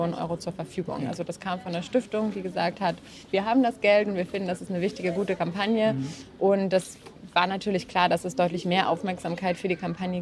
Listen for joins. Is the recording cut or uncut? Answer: cut